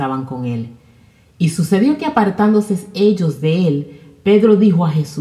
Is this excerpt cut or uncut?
uncut